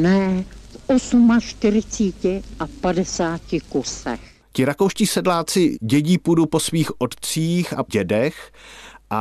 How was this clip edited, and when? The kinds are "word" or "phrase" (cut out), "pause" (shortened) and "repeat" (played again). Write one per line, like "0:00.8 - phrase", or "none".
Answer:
0:04.4 - pause
0:07.9 - word